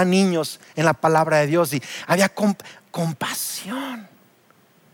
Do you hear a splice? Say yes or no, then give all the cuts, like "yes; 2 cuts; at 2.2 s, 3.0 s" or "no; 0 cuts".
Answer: no; 0 cuts